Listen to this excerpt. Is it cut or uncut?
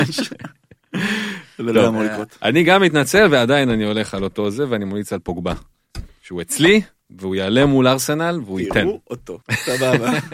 cut